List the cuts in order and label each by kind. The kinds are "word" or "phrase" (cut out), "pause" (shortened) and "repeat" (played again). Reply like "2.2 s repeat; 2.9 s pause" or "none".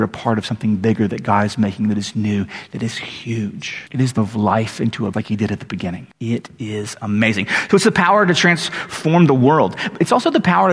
3.9 s pause; 4.2 s word; 5.1 s phrase; 6.1 s pause